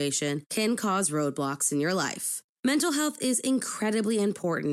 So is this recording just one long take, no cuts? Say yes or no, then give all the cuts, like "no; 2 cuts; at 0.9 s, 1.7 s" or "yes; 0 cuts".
yes; 0 cuts